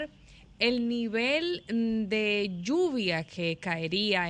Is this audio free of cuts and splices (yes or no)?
yes